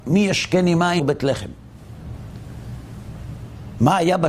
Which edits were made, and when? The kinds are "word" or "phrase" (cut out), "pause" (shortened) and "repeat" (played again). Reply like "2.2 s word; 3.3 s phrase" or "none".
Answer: 1.0 s word